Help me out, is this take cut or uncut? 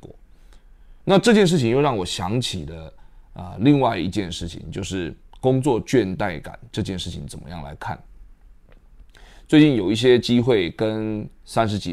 cut